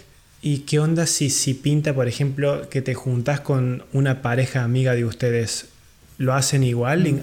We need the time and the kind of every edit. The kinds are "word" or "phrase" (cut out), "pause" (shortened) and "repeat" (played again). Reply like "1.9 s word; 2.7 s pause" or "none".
none